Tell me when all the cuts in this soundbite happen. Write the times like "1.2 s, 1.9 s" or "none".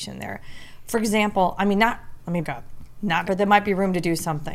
2.4 s, 3.2 s

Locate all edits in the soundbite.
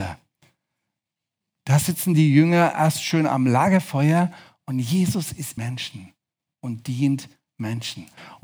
5.6 s

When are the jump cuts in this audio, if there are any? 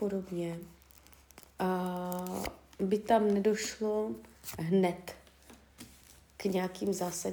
none

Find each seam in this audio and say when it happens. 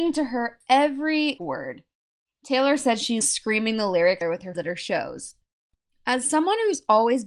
1.4 s, 3.2 s, 4.2 s, 4.5 s

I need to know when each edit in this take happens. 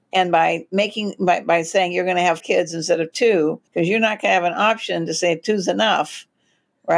2.4 s, 3.7 s

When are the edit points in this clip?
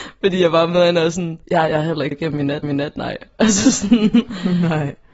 1.4 s, 2.1 s, 2.6 s

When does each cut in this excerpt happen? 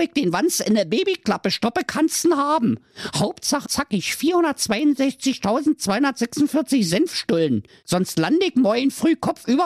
3.7 s, 7.7 s

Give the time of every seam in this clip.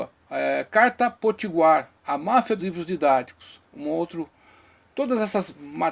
2.6 s

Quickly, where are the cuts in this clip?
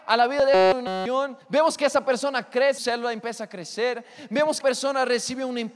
1.4 s, 2.8 s, 4.6 s

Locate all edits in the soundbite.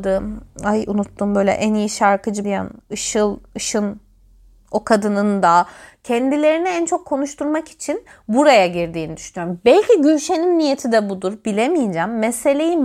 2.4 s

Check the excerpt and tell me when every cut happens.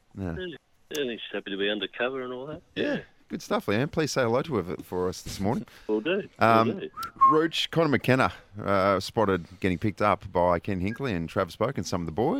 none

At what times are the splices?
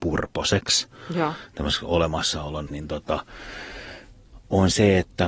2.7 s

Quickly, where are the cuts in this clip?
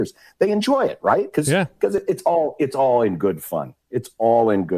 none

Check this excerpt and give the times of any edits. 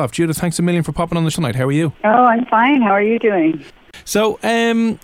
1.3 s

